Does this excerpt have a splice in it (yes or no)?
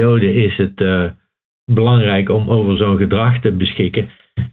no